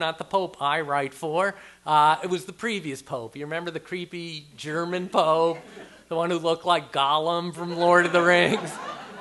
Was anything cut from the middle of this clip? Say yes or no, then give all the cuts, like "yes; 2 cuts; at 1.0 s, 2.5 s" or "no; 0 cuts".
no; 0 cuts